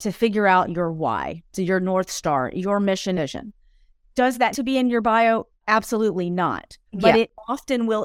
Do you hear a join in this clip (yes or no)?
yes